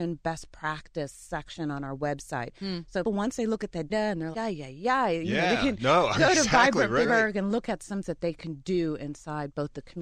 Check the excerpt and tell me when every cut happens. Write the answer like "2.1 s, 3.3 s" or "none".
3.0 s, 3.9 s, 4.3 s, 7.0 s, 8.0 s